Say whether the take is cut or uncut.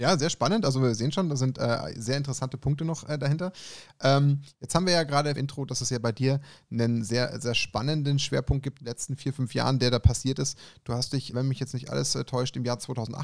cut